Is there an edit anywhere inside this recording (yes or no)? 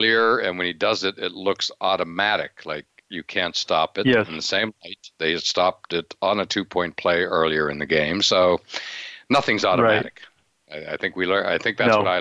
no